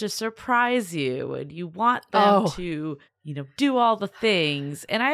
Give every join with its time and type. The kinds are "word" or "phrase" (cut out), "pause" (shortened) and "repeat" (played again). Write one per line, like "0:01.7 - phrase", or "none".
none

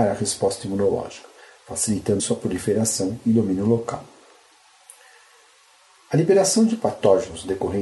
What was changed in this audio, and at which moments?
0:02.2 - word

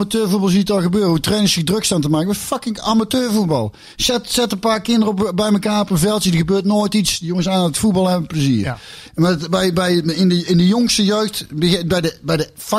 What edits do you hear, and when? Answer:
none

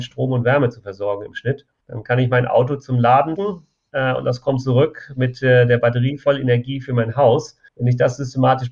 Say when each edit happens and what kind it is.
0:01.8 - pause
0:03.4 - word
0:07.7 - pause

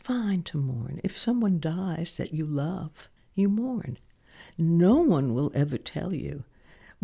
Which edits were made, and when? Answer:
0:03.2 - pause

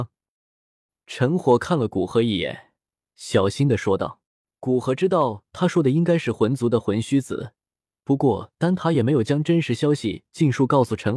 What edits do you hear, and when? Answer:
0:04.2 - pause

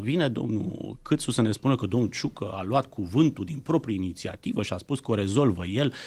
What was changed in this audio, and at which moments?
none

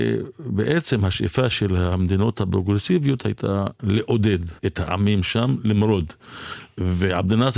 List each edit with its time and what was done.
0:04.6 - pause

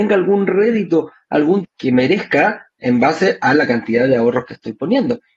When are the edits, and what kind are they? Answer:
0:01.6 - word

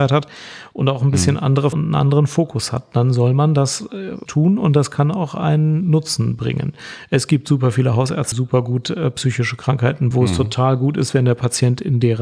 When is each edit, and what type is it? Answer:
0:01.7 - phrase
0:04.3 - word
0:08.3 - word
0:10.1 - phrase

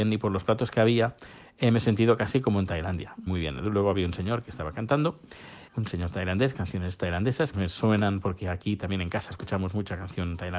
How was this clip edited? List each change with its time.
0:03.3 - word
0:05.7 - pause
0:07.5 - phrase

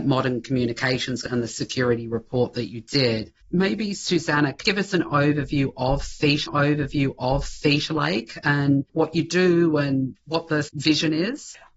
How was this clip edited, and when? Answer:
0:01.2 - word
0:03.4 - pause
0:04.6 - phrase
0:06.5 - repeat
0:08.9 - pause
0:10.2 - pause

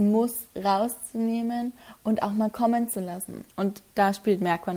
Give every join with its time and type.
0:03.5 - pause

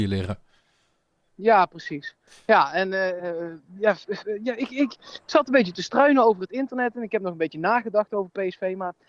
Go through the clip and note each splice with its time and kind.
0:03.2 - word

